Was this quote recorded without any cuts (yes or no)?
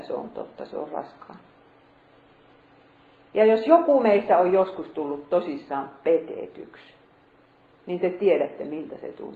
yes